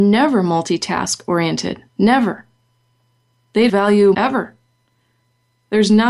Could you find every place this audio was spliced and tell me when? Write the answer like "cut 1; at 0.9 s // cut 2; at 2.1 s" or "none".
cut 1; at 1.9 s // cut 2; at 3.7 s // cut 3; at 4.1 s